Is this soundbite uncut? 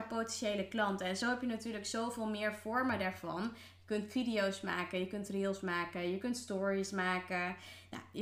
yes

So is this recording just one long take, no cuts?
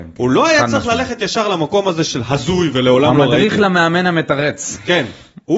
yes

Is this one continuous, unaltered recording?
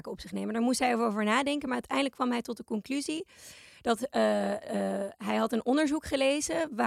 yes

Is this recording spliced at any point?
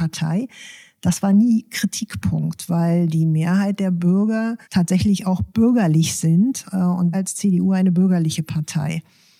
yes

